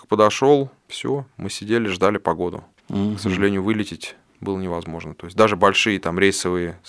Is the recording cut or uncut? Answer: uncut